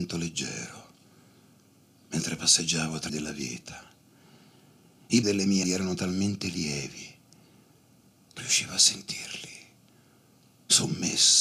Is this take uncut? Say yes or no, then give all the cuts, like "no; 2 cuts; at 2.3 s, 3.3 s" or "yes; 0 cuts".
no; 4 cuts; at 3.1 s, 5.2 s, 5.6 s, 8.4 s